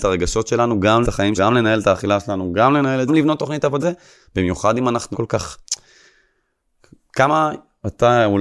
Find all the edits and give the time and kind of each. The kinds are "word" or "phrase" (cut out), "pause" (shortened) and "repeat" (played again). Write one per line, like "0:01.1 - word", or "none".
0:01.0 - word
0:01.4 - word
0:03.1 - phrase
0:03.8 - word
0:05.1 - phrase